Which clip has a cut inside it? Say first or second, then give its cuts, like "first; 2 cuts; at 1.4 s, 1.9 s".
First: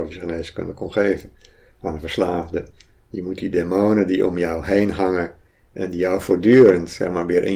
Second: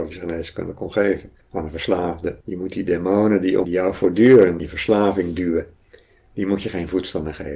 second; 4 cuts; at 1.4 s, 2.4 s, 3.6 s, 4.6 s